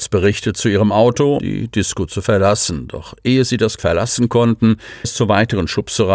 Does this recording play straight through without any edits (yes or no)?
no